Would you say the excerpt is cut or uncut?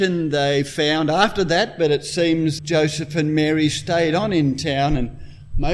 cut